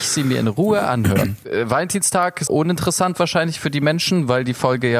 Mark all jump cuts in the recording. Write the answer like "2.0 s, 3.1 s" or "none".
2.5 s